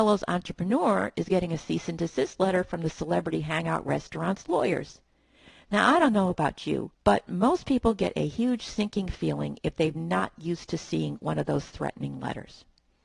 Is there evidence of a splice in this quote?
yes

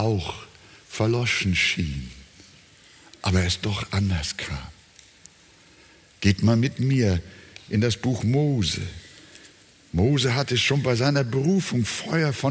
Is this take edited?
no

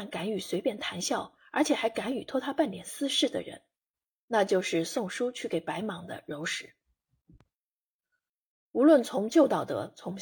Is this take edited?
no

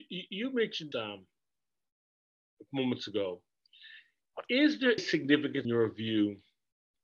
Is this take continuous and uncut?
no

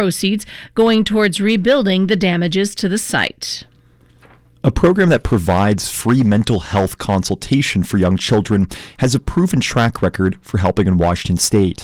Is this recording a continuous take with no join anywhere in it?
yes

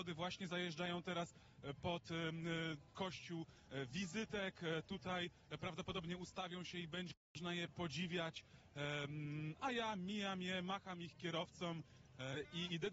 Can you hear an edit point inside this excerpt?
no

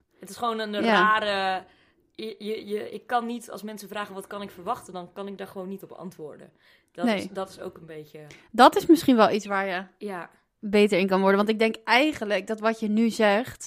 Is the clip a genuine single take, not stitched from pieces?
yes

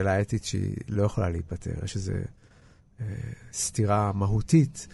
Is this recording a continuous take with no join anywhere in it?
yes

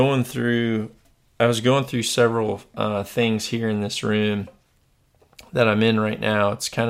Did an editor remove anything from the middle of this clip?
no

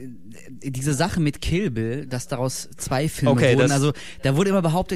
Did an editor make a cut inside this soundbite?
no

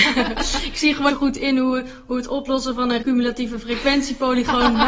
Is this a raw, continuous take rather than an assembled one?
no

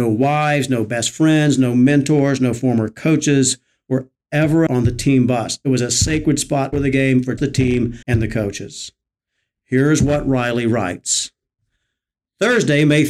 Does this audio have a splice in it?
yes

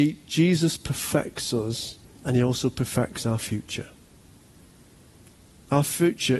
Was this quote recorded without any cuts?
no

